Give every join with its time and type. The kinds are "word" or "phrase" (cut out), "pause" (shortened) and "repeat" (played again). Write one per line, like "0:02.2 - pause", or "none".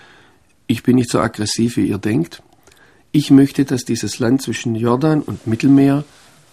none